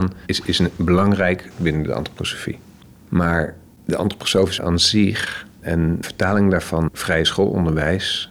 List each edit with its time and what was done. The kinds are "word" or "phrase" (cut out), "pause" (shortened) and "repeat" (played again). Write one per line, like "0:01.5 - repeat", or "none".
0:01.5 - word
0:04.6 - word
0:06.0 - word
0:06.9 - word